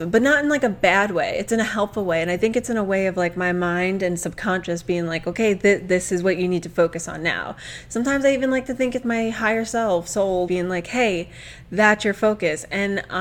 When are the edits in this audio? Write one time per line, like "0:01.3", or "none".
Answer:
0:09.0
0:10.5